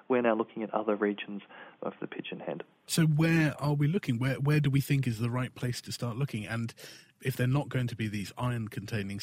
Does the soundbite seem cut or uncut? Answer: uncut